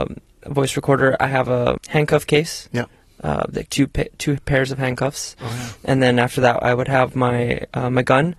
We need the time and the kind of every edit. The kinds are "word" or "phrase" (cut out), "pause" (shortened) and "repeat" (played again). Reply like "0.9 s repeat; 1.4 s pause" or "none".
3.7 s word